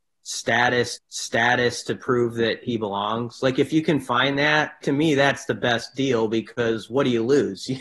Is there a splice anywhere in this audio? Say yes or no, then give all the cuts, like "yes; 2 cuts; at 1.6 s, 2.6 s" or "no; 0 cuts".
yes; 2 cuts; at 1.0 s, 4.8 s